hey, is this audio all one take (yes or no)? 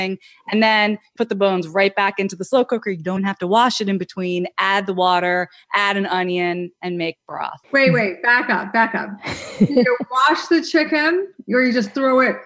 no